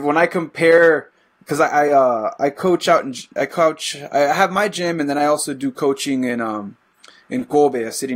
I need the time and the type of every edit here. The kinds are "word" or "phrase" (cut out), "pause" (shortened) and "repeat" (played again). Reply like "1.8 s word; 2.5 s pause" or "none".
none